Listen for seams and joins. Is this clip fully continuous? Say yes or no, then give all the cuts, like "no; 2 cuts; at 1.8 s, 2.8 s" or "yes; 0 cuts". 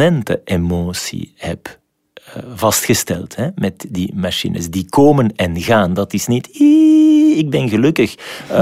yes; 0 cuts